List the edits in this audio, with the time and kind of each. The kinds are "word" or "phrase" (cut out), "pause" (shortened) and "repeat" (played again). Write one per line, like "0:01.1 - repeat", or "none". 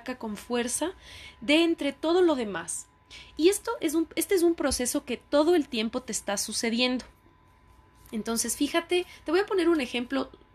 none